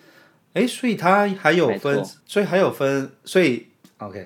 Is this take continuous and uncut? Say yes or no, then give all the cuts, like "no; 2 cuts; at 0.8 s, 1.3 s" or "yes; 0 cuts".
no; 1 cut; at 2.2 s